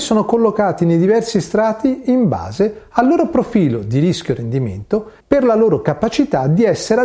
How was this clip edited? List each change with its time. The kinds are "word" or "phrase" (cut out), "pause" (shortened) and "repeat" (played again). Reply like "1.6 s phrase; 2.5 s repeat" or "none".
5.2 s pause